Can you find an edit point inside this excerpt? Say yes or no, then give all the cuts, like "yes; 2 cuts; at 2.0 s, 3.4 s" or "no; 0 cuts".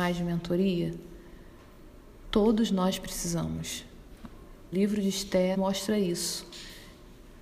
yes; 2 cuts; at 4.7 s, 5.5 s